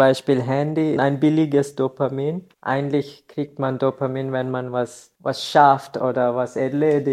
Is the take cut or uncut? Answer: cut